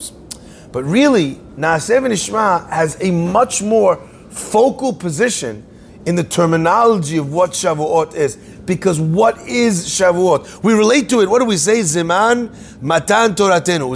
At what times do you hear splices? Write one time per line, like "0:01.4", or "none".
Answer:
none